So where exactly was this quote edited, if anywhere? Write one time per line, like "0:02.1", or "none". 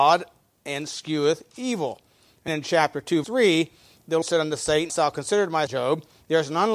0:02.5
0:03.2
0:04.2
0:04.9
0:05.7